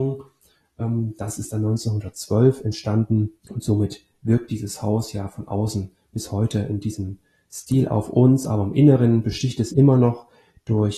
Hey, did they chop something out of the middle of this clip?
yes; 2 cuts; at 3.4 s, 9.7 s

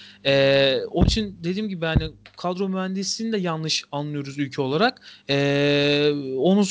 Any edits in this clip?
no; 0 cuts

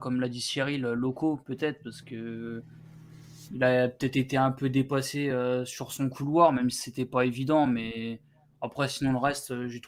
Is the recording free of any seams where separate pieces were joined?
yes; 0 cuts

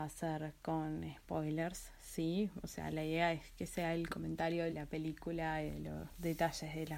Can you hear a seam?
yes; 1 cut; at 4.7 s

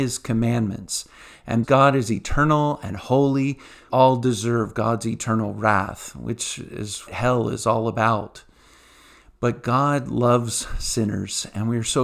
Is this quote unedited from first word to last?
no; 3 cuts; at 1.6 s, 3.9 s, 7.1 s

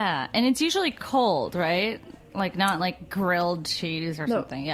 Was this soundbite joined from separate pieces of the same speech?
no; 0 cuts

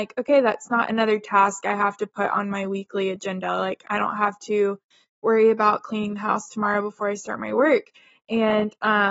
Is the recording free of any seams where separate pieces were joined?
yes; 0 cuts

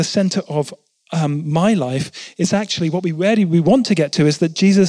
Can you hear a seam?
no; 0 cuts

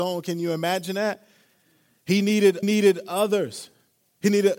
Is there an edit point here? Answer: yes; 1 cut; at 2.6 s

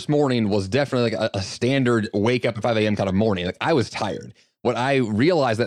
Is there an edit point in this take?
no; 0 cuts

